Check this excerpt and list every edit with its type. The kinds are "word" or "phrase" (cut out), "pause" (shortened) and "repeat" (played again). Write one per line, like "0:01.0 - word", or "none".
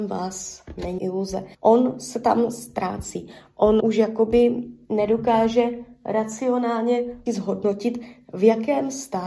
0:01.0 - word
0:01.5 - pause
0:03.8 - word
0:07.3 - word